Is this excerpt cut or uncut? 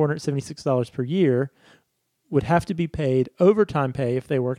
uncut